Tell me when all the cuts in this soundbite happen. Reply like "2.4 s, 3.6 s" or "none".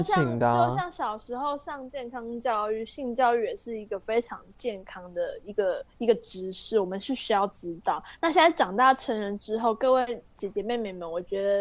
5.9 s